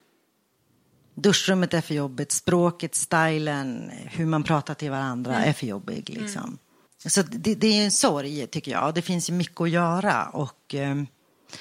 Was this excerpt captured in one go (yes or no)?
no